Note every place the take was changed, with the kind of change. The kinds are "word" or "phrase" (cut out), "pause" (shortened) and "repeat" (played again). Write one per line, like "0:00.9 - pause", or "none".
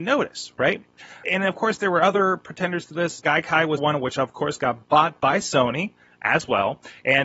0:01.2 - word
0:03.2 - word
0:03.8 - word